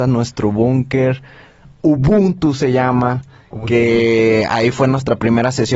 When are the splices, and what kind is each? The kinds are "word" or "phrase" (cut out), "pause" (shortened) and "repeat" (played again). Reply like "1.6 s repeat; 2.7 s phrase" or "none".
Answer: none